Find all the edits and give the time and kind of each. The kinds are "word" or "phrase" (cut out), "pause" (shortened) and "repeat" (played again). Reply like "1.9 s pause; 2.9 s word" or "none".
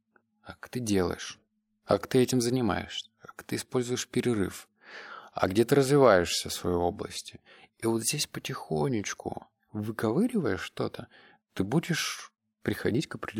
none